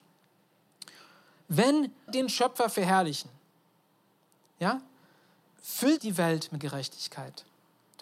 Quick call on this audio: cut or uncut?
cut